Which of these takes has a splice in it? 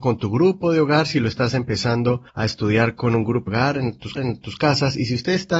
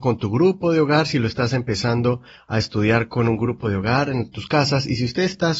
first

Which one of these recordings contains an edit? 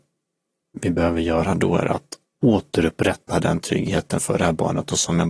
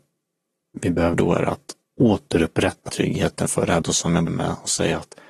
second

